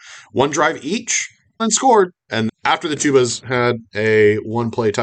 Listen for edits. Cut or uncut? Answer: cut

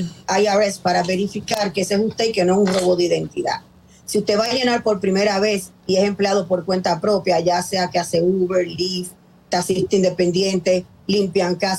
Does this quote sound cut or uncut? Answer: uncut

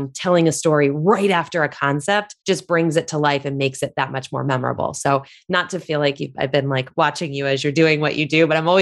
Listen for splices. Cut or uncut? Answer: cut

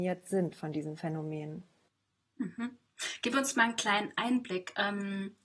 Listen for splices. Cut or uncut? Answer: uncut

